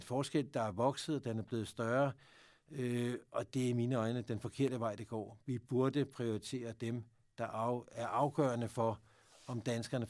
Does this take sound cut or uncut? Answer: uncut